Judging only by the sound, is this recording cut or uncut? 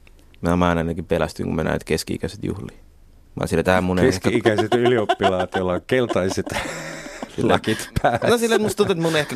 uncut